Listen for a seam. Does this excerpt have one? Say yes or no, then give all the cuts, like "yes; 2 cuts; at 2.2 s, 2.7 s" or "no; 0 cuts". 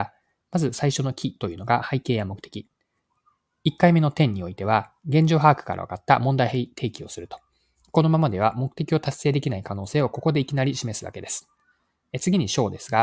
no; 0 cuts